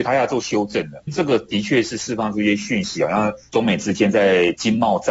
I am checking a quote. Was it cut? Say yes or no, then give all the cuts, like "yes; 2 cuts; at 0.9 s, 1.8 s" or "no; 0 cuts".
yes; 1 cut; at 3.5 s